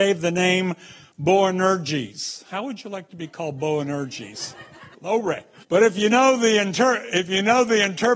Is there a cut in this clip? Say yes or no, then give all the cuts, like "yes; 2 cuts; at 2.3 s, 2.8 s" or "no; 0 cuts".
yes; 2 cuts; at 4.9 s, 5.6 s